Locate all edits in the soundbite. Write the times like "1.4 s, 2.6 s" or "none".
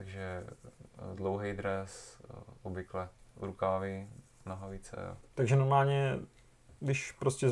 none